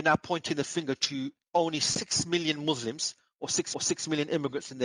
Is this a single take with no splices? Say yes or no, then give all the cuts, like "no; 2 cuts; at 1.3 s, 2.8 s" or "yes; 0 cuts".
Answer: no; 1 cut; at 3.7 s